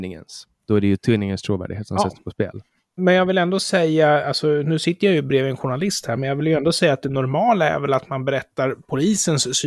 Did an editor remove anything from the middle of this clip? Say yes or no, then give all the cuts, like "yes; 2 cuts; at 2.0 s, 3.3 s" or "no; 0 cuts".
no; 0 cuts